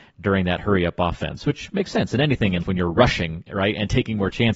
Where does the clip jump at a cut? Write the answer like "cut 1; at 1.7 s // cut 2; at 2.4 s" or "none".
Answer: cut 1; at 2.6 s